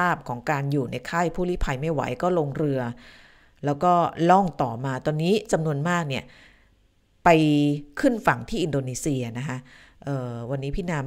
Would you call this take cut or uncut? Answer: uncut